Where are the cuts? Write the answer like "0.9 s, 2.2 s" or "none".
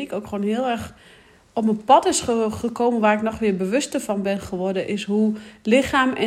none